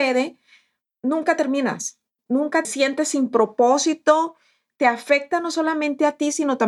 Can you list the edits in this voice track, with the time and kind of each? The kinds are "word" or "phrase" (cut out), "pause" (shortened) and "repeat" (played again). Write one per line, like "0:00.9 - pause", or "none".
0:02.6 - phrase